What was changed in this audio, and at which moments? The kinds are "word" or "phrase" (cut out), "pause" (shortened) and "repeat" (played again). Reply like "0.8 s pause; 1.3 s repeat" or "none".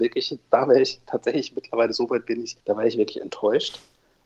2.6 s pause